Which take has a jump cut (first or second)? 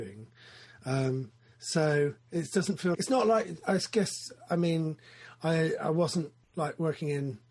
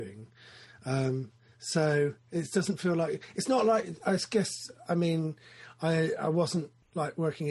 first